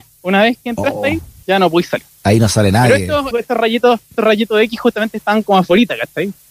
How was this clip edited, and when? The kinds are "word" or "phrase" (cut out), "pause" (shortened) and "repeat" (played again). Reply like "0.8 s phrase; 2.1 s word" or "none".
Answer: 1.4 s word; 3.3 s word; 4.2 s word